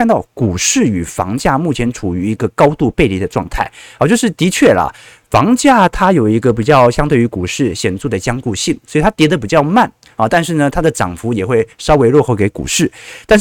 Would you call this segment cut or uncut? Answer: uncut